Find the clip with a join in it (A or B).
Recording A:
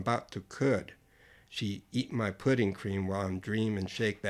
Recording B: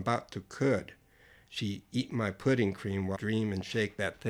B